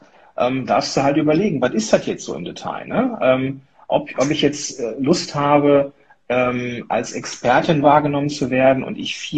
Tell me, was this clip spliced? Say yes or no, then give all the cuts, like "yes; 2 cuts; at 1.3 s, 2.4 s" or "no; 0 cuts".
no; 0 cuts